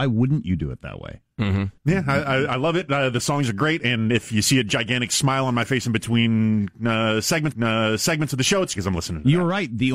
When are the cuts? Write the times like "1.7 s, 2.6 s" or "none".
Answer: 1.8 s, 7.5 s, 8.8 s